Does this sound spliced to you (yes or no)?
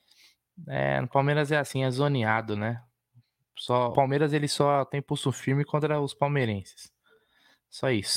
yes